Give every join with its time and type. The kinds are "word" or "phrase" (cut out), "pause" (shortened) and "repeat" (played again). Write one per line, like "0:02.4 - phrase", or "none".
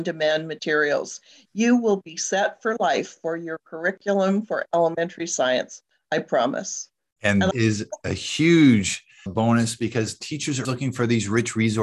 0:07.5 - word
0:09.3 - word
0:10.6 - word